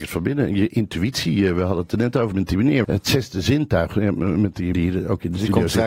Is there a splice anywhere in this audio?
yes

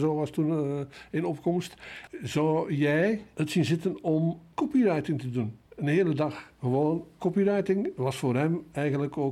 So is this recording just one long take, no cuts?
no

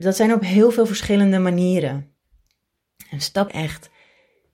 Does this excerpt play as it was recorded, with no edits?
no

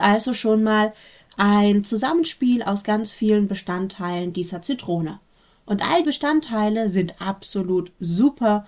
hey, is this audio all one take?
no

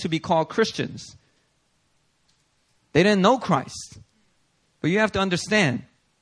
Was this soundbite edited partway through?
no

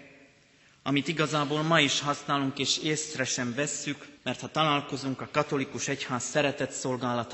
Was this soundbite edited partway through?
yes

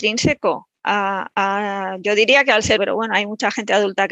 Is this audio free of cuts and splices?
no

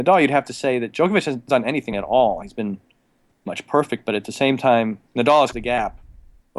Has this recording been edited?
yes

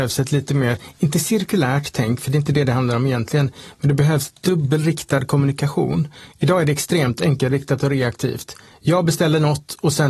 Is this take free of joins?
yes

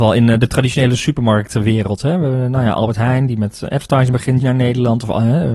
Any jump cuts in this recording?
yes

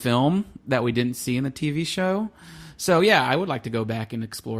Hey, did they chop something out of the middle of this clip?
no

